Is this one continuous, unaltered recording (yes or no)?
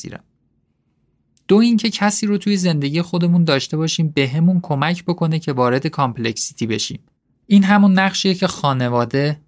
yes